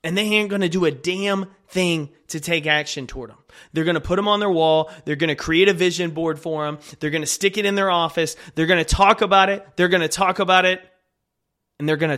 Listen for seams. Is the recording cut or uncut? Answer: uncut